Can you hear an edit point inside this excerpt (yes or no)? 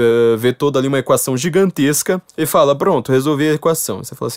yes